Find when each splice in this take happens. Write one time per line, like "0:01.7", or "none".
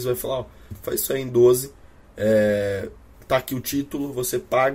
none